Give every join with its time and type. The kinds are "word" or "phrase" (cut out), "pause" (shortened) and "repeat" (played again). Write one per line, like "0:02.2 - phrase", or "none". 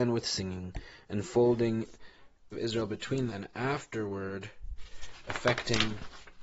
0:02.5 - word
0:03.3 - word